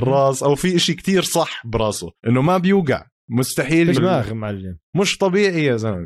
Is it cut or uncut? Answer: cut